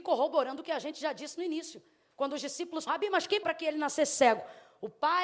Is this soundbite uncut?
no; 2 cuts; at 2.9 s, 3.4 s

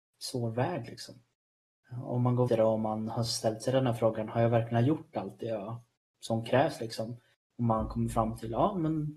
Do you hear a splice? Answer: yes; 1 cut; at 2.5 s

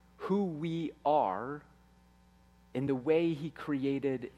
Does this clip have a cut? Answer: no; 0 cuts

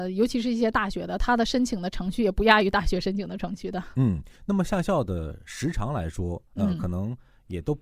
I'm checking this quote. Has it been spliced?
yes; 2 cuts; at 4.4 s, 6.5 s

